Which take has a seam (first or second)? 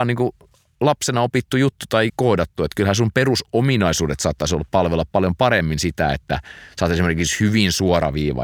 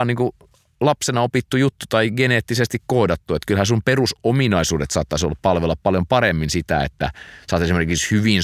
first